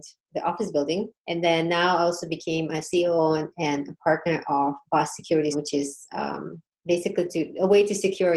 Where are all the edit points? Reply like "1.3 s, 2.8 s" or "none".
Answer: 1.2 s, 5.5 s

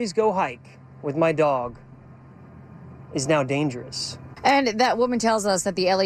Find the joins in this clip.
none

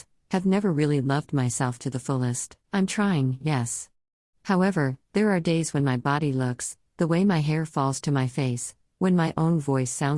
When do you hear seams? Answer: 2.6 s, 5.8 s

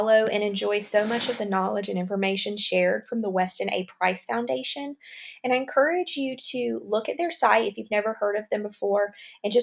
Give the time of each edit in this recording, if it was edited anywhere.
none

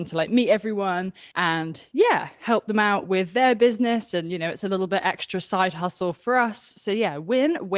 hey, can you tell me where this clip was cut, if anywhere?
1.3 s

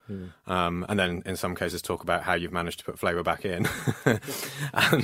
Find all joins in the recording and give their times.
none

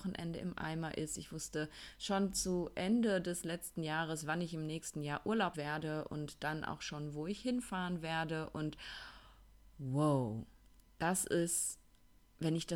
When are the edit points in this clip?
5.5 s

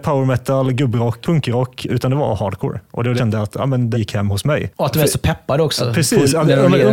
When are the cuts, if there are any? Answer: 1.2 s, 1.9 s, 3.2 s, 3.9 s

